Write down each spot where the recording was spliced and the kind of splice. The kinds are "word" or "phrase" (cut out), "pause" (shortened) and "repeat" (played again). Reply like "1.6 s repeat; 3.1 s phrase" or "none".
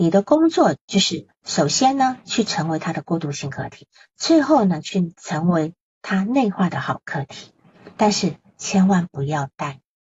none